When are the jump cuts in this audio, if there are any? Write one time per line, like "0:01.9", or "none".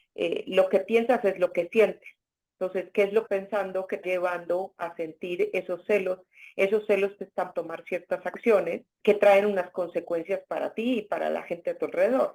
0:03.3
0:04.0
0:07.5
0:09.0